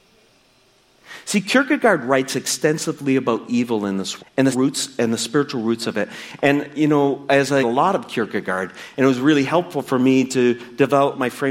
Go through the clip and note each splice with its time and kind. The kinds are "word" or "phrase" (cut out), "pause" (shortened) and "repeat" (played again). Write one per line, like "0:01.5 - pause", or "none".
0:04.2 - word
0:04.5 - word
0:07.6 - phrase